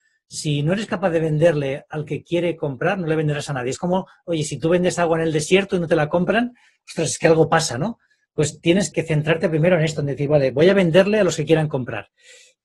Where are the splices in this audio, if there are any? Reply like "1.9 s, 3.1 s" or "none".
8.9 s